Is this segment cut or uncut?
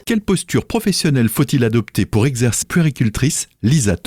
cut